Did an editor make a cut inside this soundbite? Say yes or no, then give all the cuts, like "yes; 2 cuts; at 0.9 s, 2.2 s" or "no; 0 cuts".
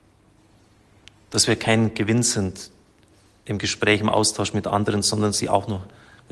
no; 0 cuts